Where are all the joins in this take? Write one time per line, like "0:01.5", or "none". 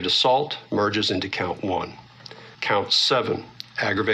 0:02.5